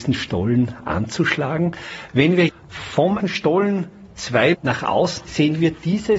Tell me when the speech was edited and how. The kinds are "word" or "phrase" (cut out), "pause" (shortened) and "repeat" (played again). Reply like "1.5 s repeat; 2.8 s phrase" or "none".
2.5 s word; 3.2 s word; 4.5 s word; 5.2 s word

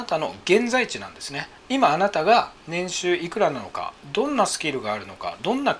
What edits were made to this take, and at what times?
1.6 s pause

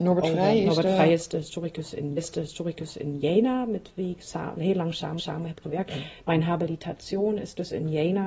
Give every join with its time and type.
2.2 s repeat; 4.6 s word; 5.2 s repeat

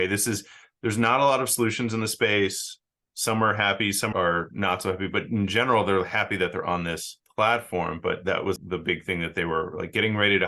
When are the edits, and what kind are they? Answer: 4.1 s word; 7.2 s pause; 8.6 s word

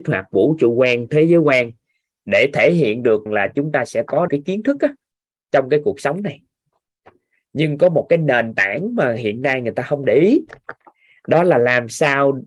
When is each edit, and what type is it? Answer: 3.3 s word; 4.3 s phrase

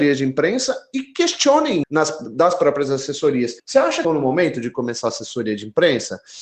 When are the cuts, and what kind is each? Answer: 1.8 s word; 3.6 s pause; 4.0 s phrase

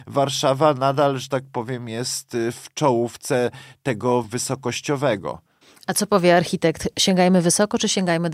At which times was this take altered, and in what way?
4.2 s word

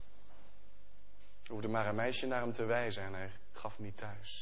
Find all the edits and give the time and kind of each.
none

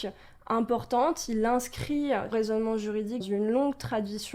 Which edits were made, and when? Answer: 2.3 s word; 3.2 s word

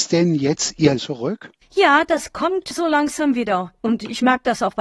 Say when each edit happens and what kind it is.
1.0 s word

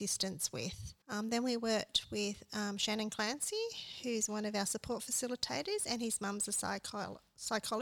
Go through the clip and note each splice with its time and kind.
1.0 s pause

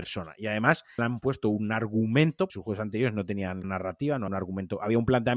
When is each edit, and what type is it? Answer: 1.0 s word; 2.5 s word; 3.6 s word; 4.3 s word

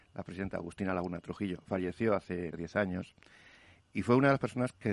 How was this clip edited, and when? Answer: 2.5 s word

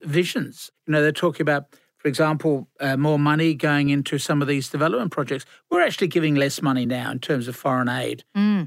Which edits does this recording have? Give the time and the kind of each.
none

